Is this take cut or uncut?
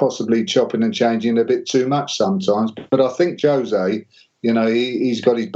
uncut